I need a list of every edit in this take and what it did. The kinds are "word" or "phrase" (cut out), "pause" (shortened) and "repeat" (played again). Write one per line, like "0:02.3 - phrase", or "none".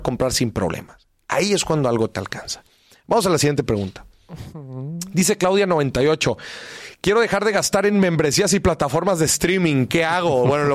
none